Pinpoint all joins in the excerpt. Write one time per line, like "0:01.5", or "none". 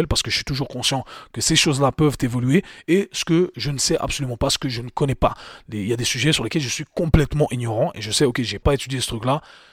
0:08.6